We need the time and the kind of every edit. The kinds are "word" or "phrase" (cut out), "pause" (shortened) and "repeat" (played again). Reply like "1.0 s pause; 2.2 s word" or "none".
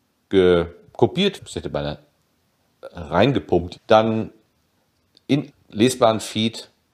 1.4 s word; 3.8 s word; 5.5 s word